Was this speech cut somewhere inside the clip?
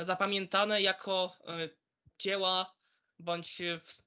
no; 0 cuts

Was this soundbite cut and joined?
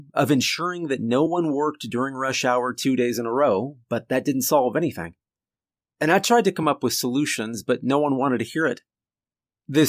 no; 0 cuts

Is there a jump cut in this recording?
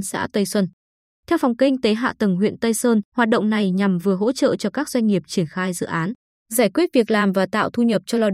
yes; 1 cut; at 3.1 s

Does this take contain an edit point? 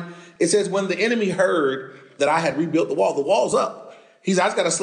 no; 0 cuts

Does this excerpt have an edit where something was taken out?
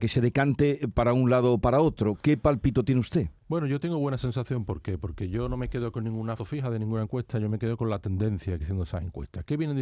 yes; 2 cuts; at 6.4 s, 8.6 s

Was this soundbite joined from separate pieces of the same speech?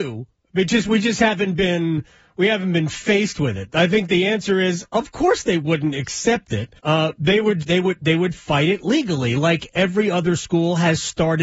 yes; 2 cuts; at 6.8 s, 7.6 s

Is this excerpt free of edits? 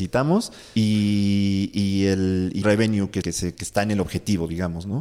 no; 3 cuts; at 2.6 s, 3.2 s, 3.5 s

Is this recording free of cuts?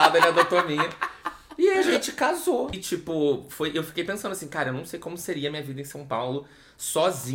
yes; 0 cuts

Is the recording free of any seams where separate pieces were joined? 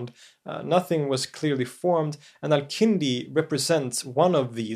yes; 0 cuts

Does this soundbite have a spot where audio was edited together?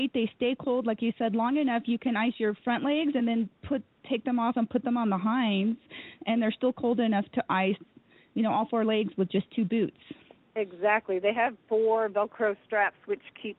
no; 0 cuts

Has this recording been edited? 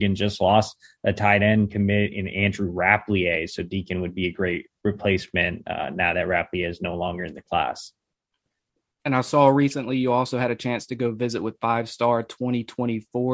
no; 0 cuts

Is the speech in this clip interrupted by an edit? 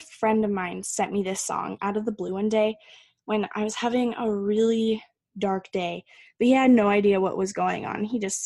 no; 0 cuts

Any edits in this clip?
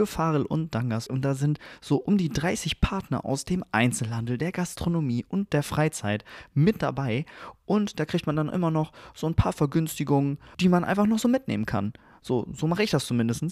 no; 0 cuts

